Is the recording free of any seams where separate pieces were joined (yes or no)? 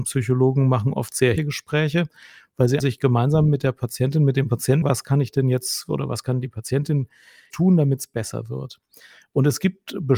no